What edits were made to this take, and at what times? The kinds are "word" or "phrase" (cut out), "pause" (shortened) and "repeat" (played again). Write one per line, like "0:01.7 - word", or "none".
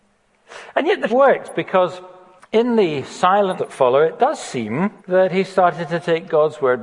0:01.1 - word
0:02.4 - pause
0:03.6 - word
0:05.0 - pause